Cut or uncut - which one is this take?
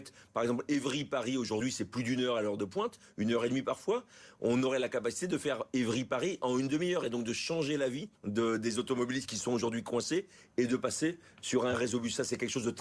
cut